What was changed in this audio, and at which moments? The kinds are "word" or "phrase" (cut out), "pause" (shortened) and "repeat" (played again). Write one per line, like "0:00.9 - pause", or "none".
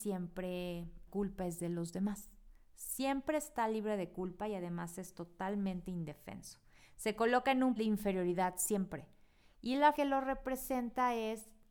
0:01.1 - word
0:07.8 - word
0:09.9 - word